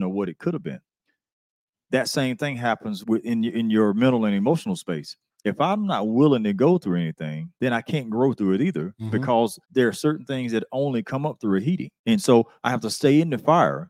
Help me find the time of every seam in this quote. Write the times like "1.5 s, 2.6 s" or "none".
3.0 s, 7.6 s, 9.6 s, 12.0 s